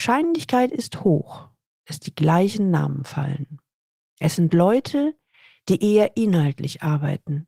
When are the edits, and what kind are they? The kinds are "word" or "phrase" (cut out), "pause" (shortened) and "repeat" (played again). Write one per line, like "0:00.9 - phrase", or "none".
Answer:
none